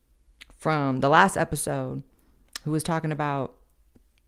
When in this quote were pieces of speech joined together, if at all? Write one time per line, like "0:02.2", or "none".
none